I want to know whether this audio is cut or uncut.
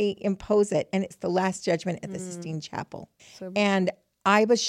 cut